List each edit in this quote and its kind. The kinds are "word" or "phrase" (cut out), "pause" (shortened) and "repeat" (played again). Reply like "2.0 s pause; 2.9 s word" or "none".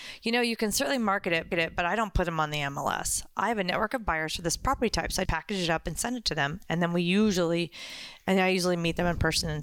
1.5 s repeat; 5.3 s word